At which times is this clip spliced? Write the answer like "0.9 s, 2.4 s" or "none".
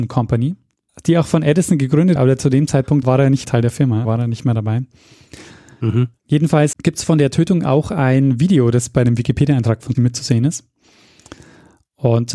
2.2 s, 3.0 s, 3.4 s, 4.0 s, 6.7 s, 9.9 s

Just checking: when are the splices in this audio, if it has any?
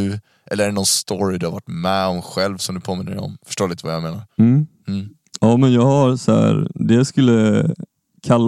4.3 s

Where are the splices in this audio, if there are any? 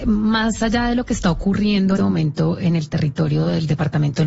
2.0 s

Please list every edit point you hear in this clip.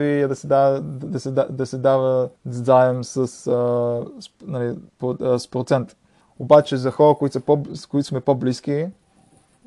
2.4 s, 4.9 s, 6.2 s

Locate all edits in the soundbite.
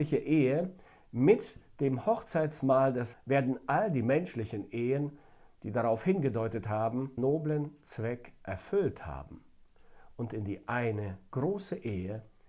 3.1 s, 7.2 s

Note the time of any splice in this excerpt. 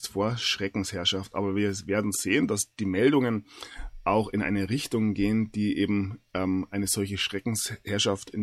none

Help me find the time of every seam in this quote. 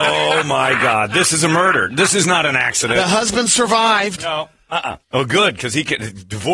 5.0 s

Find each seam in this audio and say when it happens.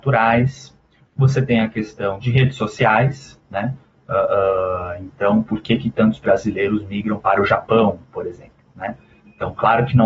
none

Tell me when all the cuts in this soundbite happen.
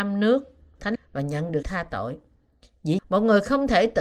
1.0 s, 1.6 s, 3.0 s

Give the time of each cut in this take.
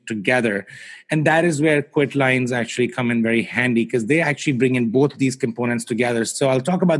none

